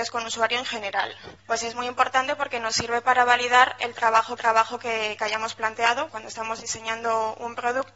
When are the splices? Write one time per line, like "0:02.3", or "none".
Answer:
0:01.4
0:04.4
0:06.1